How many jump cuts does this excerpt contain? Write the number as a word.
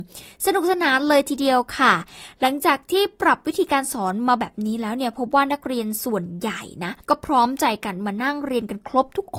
one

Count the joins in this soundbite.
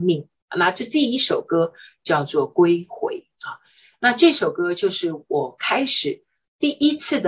zero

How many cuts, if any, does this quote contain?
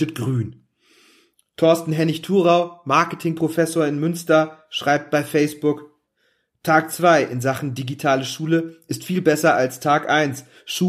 zero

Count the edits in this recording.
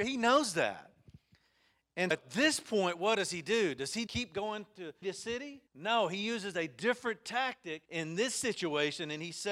five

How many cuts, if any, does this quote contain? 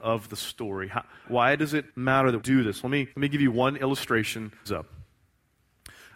five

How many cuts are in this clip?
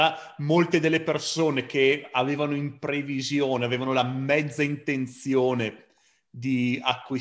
zero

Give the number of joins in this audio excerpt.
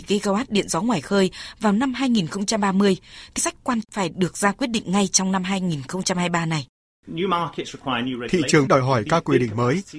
three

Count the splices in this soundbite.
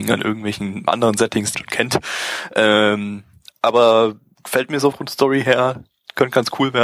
two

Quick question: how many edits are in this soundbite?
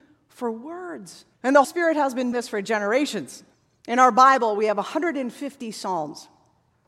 four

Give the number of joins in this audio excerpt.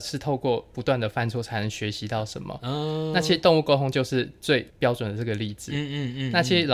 one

